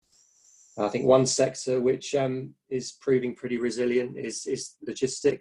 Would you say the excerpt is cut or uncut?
uncut